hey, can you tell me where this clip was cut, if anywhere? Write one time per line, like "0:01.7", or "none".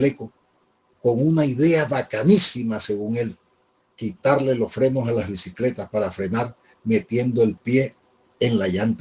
none